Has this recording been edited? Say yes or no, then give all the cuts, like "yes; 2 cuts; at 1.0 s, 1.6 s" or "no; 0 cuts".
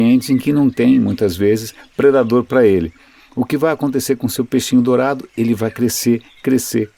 no; 0 cuts